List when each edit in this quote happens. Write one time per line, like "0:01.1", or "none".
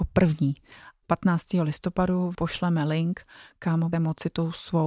0:01.0
0:02.3
0:03.9